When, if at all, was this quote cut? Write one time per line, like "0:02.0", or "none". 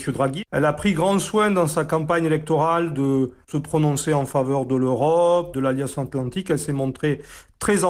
none